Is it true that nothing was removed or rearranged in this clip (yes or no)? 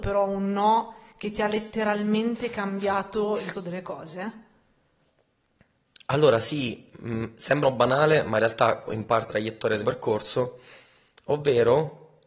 no